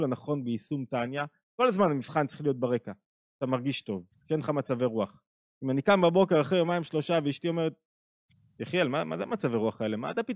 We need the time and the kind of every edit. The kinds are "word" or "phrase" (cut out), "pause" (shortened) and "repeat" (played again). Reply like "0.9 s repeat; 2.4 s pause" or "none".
none